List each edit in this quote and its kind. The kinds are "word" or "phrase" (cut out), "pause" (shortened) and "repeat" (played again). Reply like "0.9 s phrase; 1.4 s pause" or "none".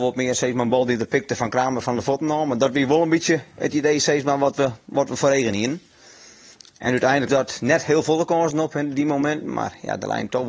7.3 s phrase